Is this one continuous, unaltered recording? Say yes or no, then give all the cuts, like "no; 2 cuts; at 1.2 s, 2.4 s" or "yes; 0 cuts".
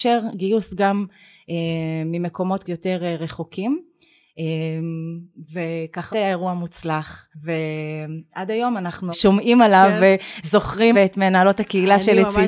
no; 5 cuts; at 2.6 s, 6.1 s, 7.3 s, 9.1 s, 10.9 s